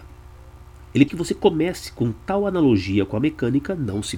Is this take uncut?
no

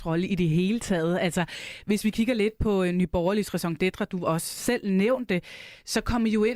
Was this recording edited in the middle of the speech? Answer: no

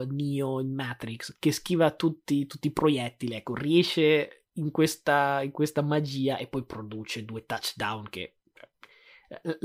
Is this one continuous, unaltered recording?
yes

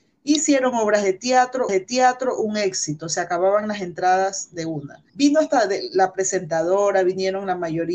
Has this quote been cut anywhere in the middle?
yes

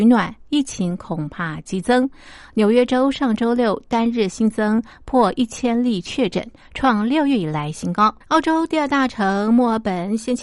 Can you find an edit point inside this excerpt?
yes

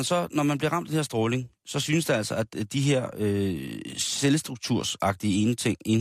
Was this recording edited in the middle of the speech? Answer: no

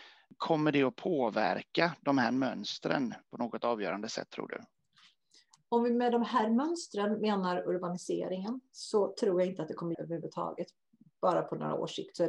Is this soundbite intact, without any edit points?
no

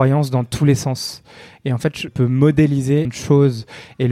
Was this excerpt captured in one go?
no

